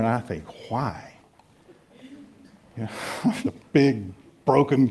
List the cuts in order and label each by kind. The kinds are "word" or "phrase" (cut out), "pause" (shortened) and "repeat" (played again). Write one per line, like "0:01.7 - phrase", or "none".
0:03.4 - word